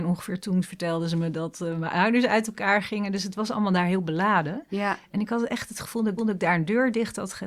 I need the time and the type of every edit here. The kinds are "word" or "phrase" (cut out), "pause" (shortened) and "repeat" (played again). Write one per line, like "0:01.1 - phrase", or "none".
0:06.2 - repeat